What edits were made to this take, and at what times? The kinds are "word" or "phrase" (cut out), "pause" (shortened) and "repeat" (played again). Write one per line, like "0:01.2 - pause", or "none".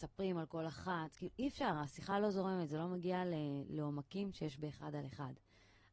none